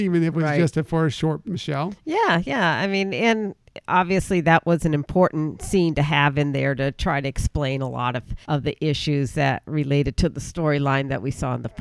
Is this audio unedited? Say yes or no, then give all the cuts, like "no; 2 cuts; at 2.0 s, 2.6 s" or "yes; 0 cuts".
no; 2 cuts; at 1.4 s, 8.4 s